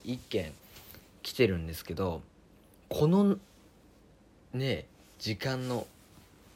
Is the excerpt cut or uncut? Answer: uncut